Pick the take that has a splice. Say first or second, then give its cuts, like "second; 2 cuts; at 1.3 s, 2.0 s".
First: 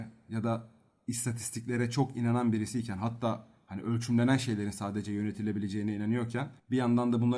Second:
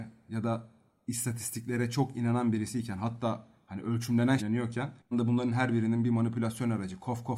second; 2 cuts; at 4.4 s, 5.1 s